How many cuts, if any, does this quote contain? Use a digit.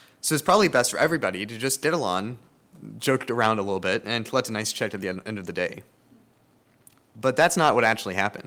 0